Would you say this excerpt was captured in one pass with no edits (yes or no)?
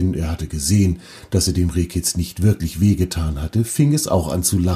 yes